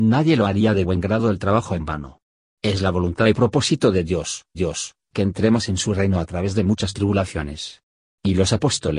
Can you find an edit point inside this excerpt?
yes; 1 cut; at 4.5 s

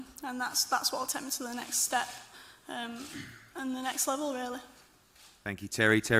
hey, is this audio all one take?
yes; 0 cuts

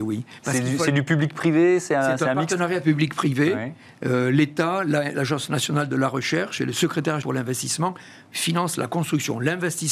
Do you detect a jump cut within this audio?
yes; 1 cut; at 7.2 s

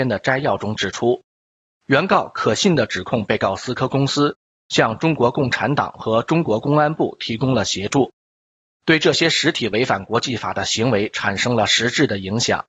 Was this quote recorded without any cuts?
yes; 0 cuts

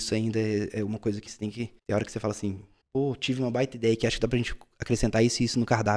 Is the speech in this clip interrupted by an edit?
yes; 3 cuts; at 1.3 s, 1.8 s, 2.8 s

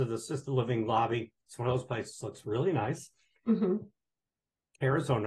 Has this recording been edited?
no; 0 cuts

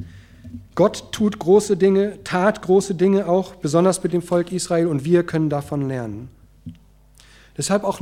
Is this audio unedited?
yes; 0 cuts

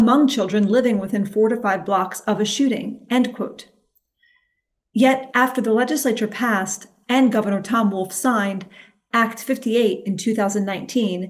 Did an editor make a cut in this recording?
no; 0 cuts

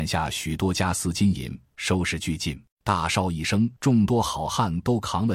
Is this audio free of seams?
no; 2 cuts; at 2.7 s, 3.8 s

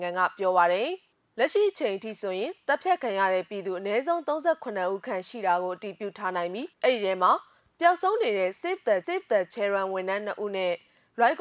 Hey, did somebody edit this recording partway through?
yes; 2 cuts; at 6.7 s, 9.0 s

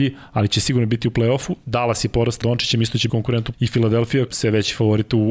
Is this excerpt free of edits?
no; 4 cuts; at 2.4 s, 3.1 s, 3.5 s, 4.3 s

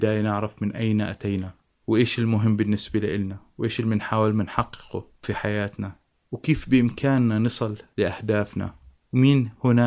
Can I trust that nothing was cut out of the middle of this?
yes; 0 cuts

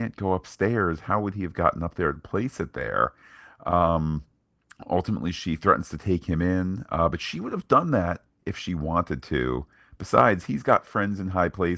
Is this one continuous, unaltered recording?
yes; 0 cuts

